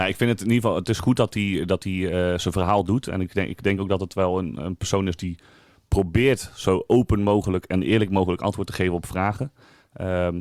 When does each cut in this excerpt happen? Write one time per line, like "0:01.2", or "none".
none